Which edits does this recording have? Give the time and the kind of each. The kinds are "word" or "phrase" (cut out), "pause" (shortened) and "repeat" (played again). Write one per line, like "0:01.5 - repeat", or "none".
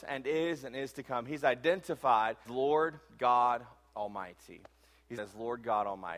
0:02.5 - word
0:05.2 - word